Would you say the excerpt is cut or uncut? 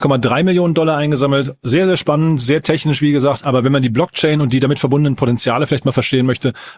uncut